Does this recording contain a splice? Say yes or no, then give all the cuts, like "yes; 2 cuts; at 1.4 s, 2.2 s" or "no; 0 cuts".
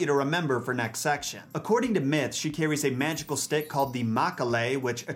no; 0 cuts